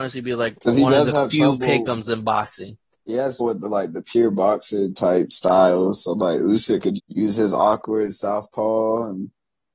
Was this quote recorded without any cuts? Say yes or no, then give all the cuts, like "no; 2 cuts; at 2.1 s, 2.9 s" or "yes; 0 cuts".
no; 3 cuts; at 2.9 s, 3.4 s, 7.0 s